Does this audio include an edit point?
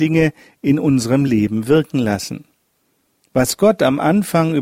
no; 0 cuts

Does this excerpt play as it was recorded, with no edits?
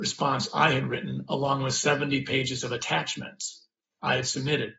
yes; 0 cuts

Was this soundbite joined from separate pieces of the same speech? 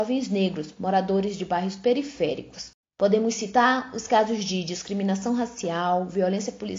no; 0 cuts

